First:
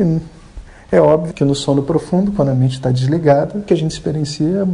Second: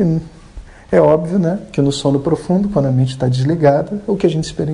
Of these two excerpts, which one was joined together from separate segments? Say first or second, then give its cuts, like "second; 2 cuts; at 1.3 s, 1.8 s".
first; 2 cuts; at 1.3 s, 3.7 s